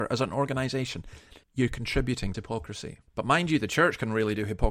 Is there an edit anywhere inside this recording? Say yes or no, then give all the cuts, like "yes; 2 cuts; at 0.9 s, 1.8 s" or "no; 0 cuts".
yes; 3 cuts; at 1.4 s, 2.3 s, 3.1 s